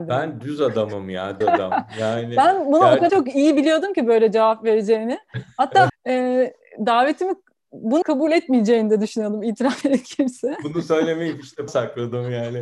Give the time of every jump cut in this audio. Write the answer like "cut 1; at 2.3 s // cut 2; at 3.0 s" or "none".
cut 1; at 1.4 s // cut 2; at 3.1 s // cut 3; at 5.9 s // cut 4; at 8.0 s // cut 5; at 9.8 s // cut 6; at 11.7 s